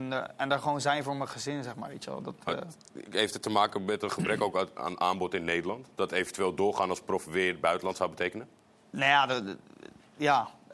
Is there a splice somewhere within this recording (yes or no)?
no